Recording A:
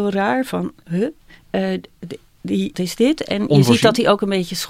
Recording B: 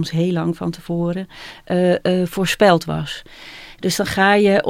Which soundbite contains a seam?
A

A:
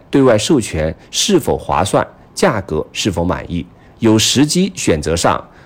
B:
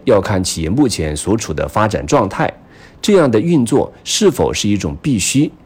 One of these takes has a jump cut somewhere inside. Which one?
A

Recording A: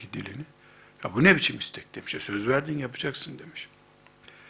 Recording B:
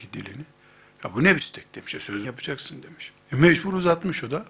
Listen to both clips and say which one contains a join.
B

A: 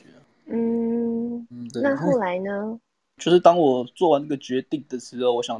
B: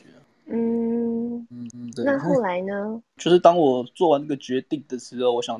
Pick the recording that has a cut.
B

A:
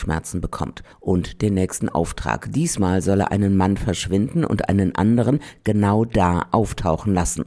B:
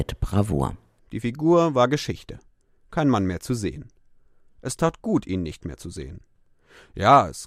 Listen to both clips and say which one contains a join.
A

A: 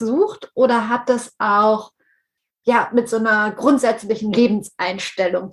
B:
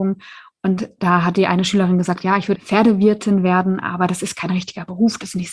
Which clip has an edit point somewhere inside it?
B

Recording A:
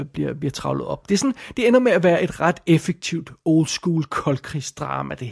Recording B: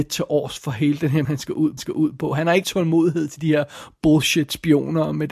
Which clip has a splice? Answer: B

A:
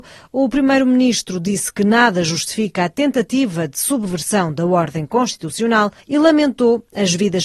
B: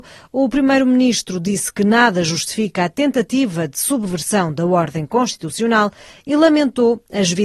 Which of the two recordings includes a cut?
A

